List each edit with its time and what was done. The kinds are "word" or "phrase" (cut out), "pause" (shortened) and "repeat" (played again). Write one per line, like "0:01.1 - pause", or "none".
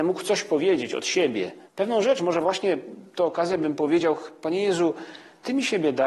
0:01.7 - pause